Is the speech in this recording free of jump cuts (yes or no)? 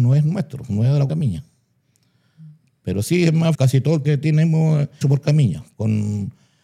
no